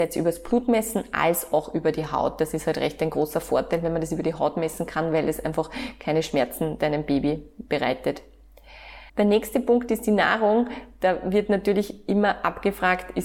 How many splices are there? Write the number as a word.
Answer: one